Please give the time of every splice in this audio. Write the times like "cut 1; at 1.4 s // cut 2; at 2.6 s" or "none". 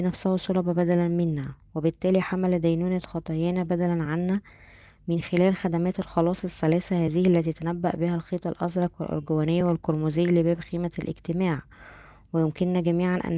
none

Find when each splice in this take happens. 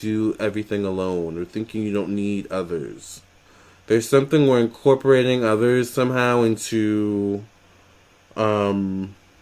cut 1; at 3.5 s

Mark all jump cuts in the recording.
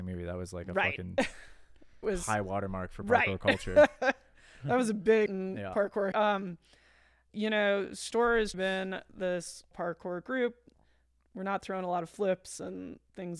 cut 1; at 2.0 s // cut 2; at 5.3 s // cut 3; at 6.1 s // cut 4; at 7.3 s // cut 5; at 8.5 s // cut 6; at 9.7 s

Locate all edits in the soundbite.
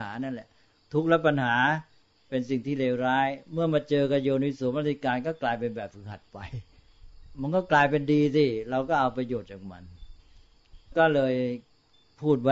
none

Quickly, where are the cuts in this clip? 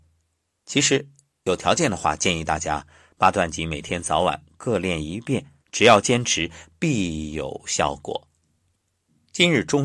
cut 1; at 5.6 s

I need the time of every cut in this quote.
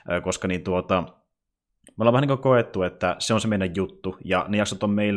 none

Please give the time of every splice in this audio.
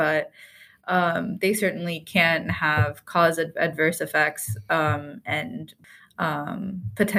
none

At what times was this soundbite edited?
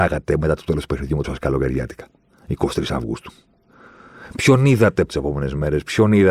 cut 1; at 1.2 s // cut 2; at 5.1 s

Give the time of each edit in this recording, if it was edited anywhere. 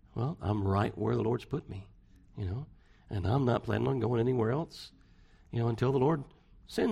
none

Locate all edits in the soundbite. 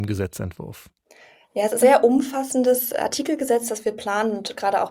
cut 1; at 1.8 s

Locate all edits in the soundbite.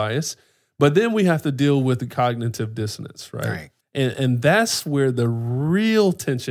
cut 1; at 3.8 s

